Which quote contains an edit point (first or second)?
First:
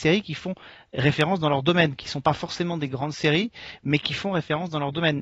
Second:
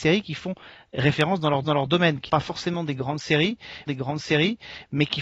second